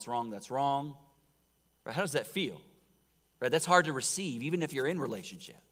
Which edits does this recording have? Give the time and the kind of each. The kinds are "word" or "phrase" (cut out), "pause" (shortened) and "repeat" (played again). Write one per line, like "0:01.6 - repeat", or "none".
0:01.6 - pause
0:03.1 - pause